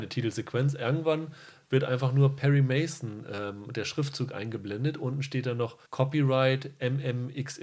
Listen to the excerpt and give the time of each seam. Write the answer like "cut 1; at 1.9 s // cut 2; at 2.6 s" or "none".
cut 1; at 5.8 s